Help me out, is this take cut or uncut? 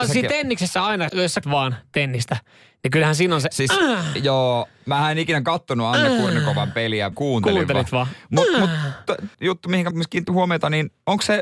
cut